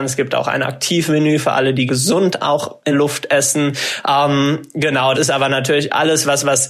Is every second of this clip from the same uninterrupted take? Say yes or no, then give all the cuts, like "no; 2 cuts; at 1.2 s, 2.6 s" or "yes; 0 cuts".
no; 3 cuts; at 1.9 s, 2.9 s, 5.1 s